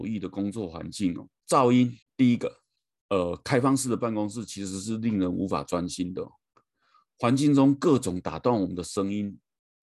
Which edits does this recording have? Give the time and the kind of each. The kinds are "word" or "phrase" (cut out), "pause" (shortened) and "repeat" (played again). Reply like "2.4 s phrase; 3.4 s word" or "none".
1.4 s pause; 2.0 s pause; 2.8 s pause